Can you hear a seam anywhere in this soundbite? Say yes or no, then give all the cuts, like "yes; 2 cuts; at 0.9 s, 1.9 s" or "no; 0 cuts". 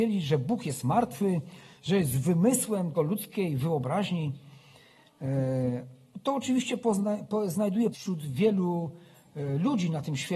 yes; 2 cuts; at 2.9 s, 7.9 s